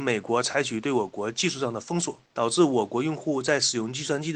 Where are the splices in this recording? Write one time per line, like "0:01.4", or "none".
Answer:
0:02.3